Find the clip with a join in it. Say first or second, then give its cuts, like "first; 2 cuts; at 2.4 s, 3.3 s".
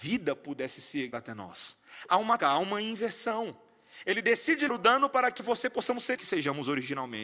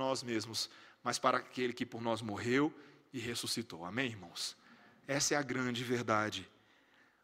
first; 5 cuts; at 1.1 s, 2.4 s, 4.7 s, 5.4 s, 6.2 s